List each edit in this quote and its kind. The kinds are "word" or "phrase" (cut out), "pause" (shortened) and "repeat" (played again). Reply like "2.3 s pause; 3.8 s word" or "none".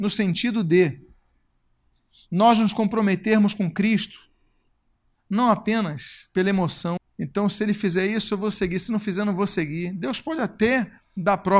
6.3 s pause; 7.0 s word